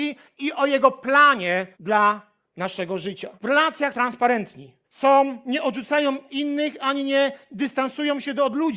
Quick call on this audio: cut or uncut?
cut